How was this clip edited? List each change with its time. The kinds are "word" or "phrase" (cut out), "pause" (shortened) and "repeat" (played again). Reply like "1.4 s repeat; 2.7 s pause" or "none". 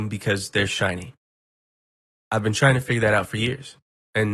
none